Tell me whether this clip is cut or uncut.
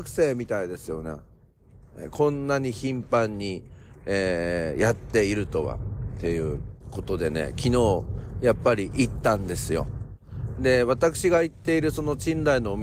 cut